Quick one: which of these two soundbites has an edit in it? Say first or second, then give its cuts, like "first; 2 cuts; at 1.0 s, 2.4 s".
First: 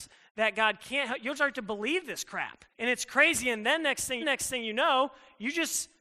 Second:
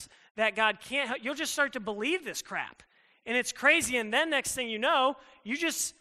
first; 3 cuts; at 1.4 s, 2.7 s, 4.2 s